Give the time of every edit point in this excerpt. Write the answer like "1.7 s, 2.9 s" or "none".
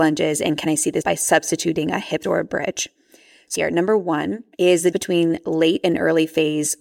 1.0 s, 2.2 s, 3.5 s, 4.5 s, 4.9 s